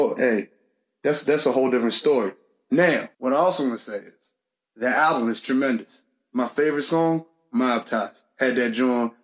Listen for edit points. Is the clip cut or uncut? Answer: cut